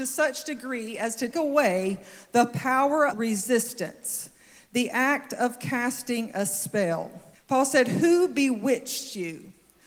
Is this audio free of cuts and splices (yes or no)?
no